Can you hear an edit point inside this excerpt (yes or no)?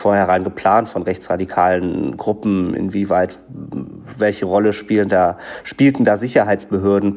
no